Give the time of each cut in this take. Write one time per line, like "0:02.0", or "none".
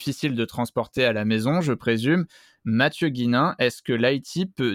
none